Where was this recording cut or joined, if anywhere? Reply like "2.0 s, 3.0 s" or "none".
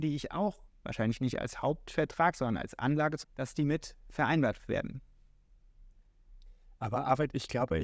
3.2 s, 4.6 s

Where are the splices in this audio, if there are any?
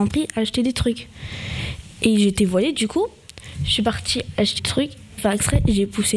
4.6 s, 5.2 s

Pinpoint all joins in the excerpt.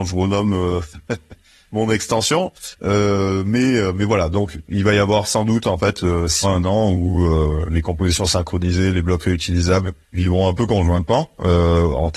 4.6 s, 6.4 s, 10.0 s

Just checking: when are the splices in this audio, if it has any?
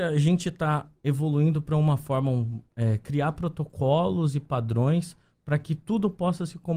none

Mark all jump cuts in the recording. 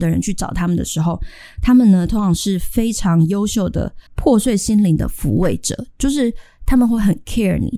4.1 s

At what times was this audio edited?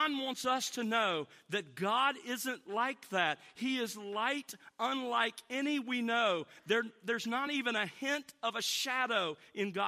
none

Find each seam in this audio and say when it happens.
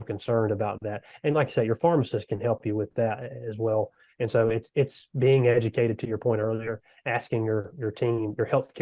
none

